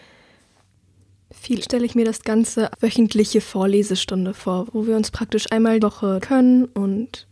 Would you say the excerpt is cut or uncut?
cut